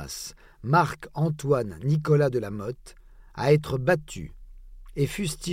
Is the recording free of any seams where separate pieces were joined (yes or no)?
yes